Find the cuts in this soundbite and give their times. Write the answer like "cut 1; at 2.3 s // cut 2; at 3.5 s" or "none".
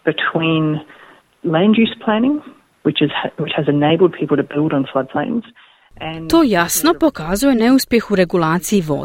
none